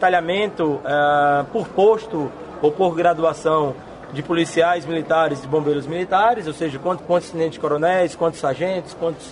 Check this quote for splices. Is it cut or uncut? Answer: cut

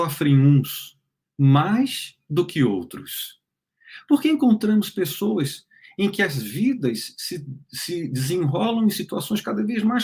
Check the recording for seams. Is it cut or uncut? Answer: uncut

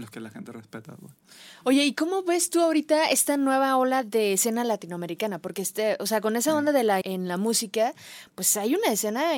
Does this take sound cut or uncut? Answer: cut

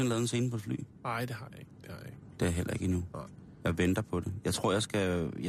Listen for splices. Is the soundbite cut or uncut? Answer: uncut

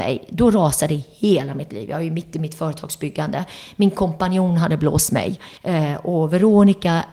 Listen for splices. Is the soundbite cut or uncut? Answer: cut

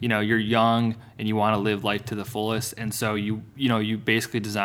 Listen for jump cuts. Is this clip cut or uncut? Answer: uncut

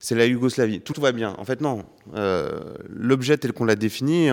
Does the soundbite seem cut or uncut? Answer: cut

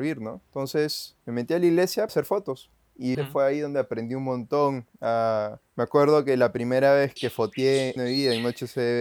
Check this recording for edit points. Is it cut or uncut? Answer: cut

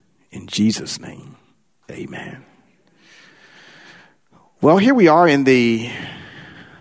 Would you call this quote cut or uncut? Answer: uncut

